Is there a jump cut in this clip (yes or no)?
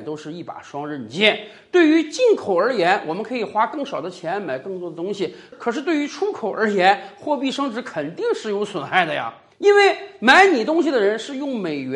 no